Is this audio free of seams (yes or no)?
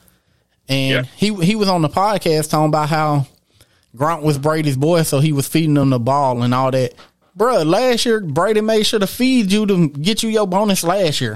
yes